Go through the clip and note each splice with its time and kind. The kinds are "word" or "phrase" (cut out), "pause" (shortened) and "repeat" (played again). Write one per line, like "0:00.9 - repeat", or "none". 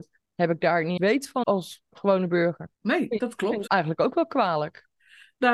0:01.0 - word
0:01.4 - word
0:02.7 - pause
0:03.7 - word

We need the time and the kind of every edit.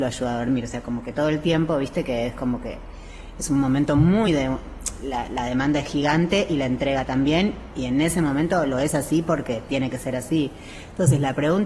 0:04.3 - word

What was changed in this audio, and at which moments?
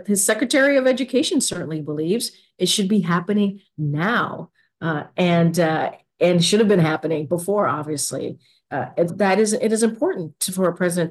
0:09.1 - word

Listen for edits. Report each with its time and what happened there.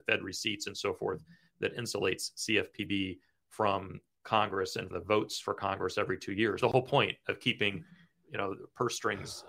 0:04.9 - word
0:06.6 - phrase

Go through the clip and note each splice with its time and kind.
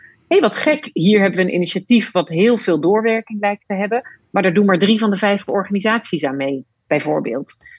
none

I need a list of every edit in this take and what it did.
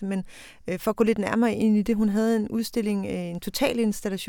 none

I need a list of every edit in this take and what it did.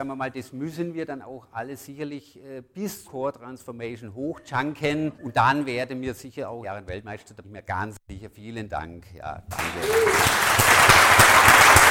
0:03.0 - word
0:05.1 - pause
0:06.6 - phrase
0:07.4 - word

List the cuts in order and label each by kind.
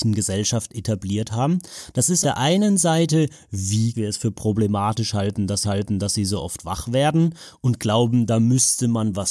0:02.2 - word
0:03.9 - phrase
0:05.6 - repeat

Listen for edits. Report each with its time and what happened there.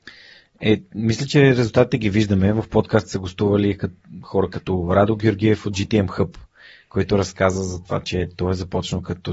none

